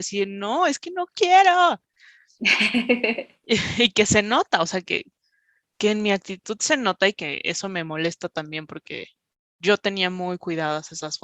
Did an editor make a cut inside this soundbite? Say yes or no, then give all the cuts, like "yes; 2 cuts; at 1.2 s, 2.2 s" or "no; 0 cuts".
no; 0 cuts